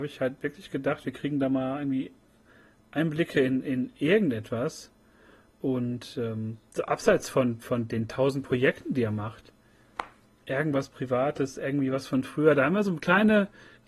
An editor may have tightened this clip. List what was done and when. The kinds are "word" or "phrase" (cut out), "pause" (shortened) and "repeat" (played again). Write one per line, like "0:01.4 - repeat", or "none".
none

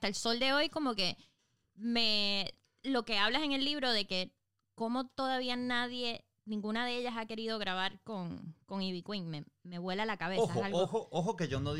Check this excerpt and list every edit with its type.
none

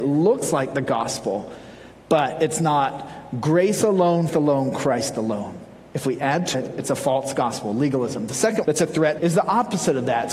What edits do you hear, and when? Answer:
0:04.3 - word
0:06.5 - word
0:08.6 - word
0:09.2 - word

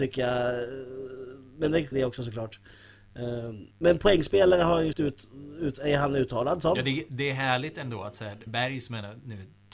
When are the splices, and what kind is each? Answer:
0:01.9 - phrase
0:03.7 - pause
0:04.9 - word
0:08.5 - word

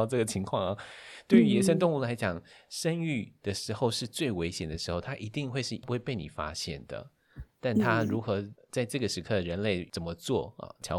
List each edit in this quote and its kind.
none

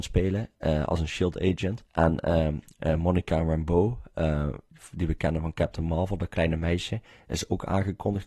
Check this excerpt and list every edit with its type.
0:01.9 - pause

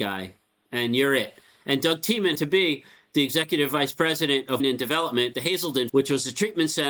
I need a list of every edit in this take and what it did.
0:02.3 - word
0:04.6 - word
0:05.3 - word
0:05.9 - word

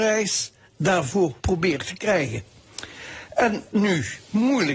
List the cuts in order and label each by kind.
0:01.4 - pause
0:03.7 - phrase

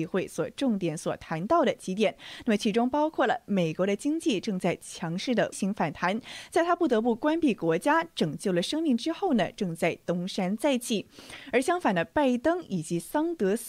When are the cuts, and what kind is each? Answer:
0:05.5 - word

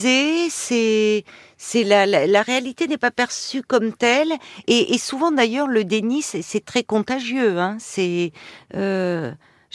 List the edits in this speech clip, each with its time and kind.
none

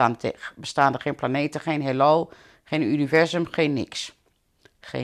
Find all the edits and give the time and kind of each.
none

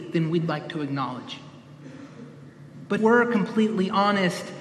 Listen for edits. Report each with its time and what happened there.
0:03.0 - word

